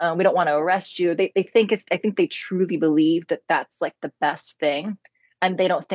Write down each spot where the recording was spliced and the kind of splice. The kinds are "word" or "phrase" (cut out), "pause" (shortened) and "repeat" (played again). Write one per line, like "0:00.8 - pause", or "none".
none